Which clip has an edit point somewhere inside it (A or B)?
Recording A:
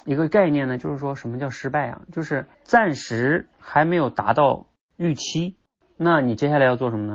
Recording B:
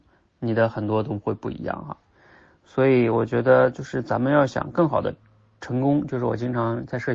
A